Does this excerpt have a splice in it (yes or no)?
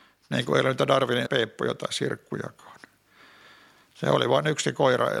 yes